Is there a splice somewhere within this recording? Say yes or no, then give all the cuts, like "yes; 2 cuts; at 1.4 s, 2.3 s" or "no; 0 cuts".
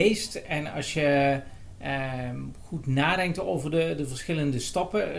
no; 0 cuts